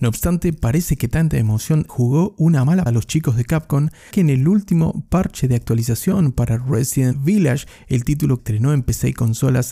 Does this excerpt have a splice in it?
yes; 5 cuts; at 1.9 s, 2.9 s, 4.1 s, 7.1 s, 8.4 s

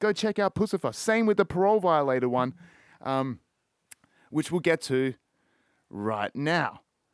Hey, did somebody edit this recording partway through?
no; 0 cuts

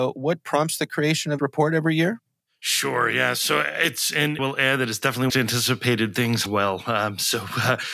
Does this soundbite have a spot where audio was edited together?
yes; 5 cuts; at 1.4 s, 2.4 s, 4.4 s, 5.3 s, 6.5 s

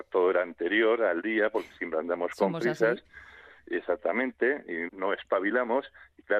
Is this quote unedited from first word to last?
no; 1 cut; at 4.9 s

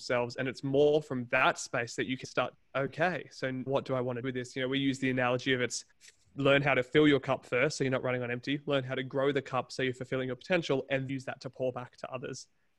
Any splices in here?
yes; 6 cuts; at 2.2 s, 2.5 s, 3.7 s, 4.2 s, 5.9 s, 11.1 s

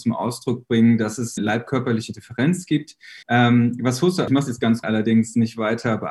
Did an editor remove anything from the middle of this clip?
yes; 4 cuts; at 1.4 s, 3.2 s, 4.3 s, 4.8 s

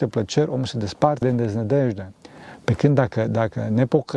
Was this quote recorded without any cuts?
no; 1 cut; at 1.2 s

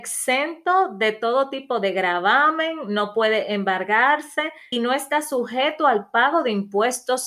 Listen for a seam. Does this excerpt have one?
yes; 1 cut; at 4.7 s

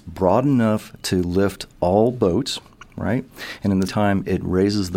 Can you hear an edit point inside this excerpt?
yes; 1 cut; at 3.9 s

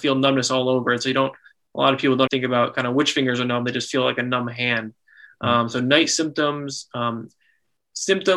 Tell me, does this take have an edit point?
yes; 1 cut; at 2.3 s

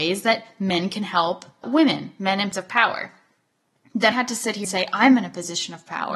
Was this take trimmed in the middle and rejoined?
yes; 4 cuts; at 1.6 s, 2.5 s, 4.1 s, 4.6 s

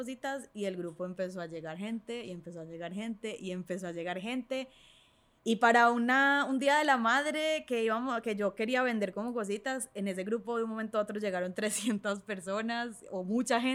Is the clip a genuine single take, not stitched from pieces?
yes; 0 cuts

